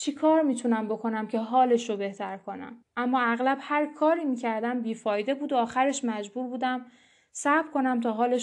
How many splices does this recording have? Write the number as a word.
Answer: one